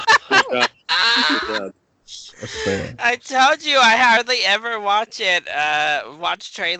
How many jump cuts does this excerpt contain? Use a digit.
0